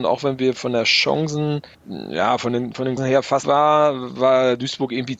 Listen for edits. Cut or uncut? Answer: cut